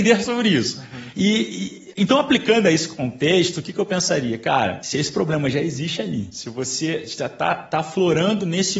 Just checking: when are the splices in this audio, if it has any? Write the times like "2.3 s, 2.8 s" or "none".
none